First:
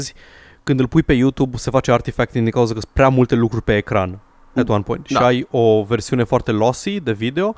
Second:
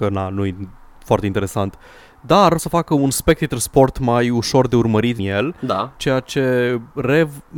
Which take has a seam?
second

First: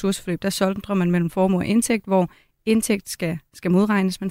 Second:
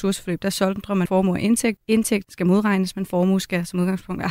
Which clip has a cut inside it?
second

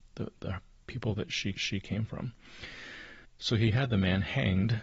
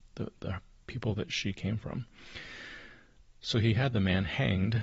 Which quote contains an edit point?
first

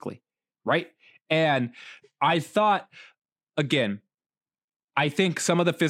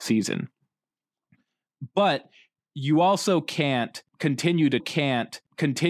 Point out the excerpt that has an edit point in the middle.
second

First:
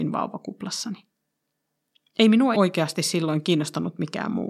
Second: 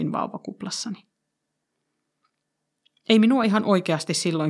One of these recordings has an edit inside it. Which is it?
first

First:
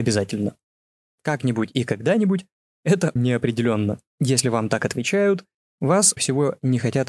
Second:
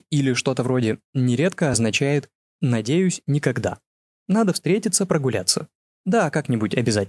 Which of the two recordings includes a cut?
first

